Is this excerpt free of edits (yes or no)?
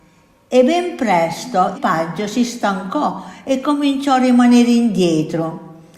no